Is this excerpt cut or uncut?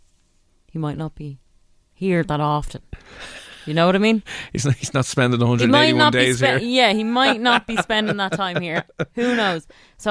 uncut